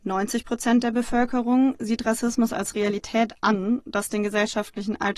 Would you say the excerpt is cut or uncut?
uncut